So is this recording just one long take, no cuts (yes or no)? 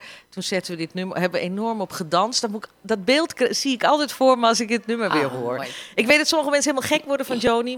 yes